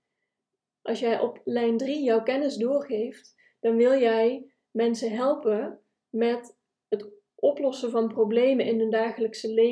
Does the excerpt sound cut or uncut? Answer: uncut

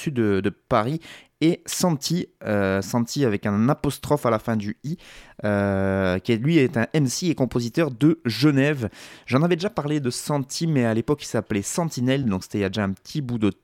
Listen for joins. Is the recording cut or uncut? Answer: uncut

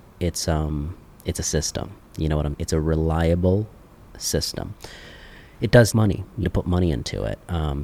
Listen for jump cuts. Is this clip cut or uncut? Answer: cut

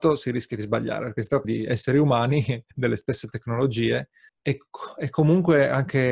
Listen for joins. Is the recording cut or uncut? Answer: cut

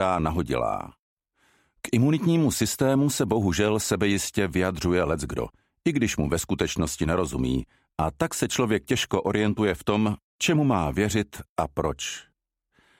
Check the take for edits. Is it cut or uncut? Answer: uncut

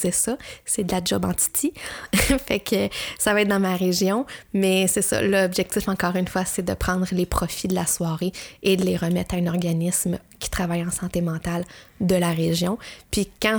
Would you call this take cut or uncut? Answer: uncut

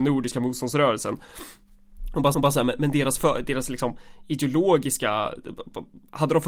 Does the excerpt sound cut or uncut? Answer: cut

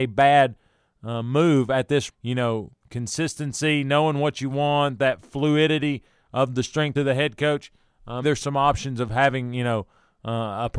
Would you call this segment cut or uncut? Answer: cut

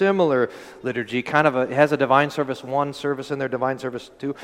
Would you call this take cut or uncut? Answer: uncut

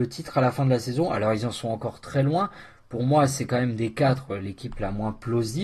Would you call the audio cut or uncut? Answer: uncut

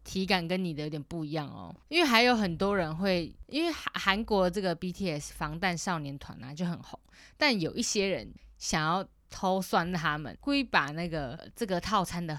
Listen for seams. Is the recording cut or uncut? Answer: cut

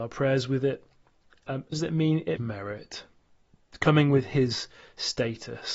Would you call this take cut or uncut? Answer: cut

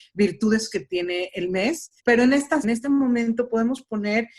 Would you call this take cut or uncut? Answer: cut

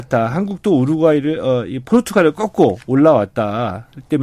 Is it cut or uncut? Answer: uncut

